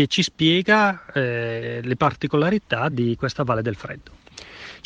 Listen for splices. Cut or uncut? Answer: uncut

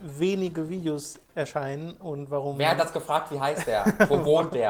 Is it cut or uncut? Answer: uncut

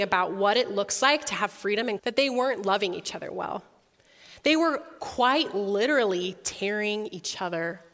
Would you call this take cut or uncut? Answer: cut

